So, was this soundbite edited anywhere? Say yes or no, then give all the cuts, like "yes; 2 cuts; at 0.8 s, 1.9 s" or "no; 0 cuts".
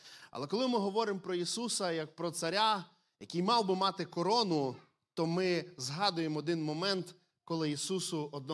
no; 0 cuts